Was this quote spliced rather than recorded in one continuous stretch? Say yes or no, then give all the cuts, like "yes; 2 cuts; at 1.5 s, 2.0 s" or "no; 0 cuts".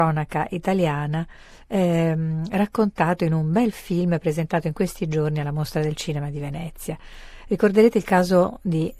no; 0 cuts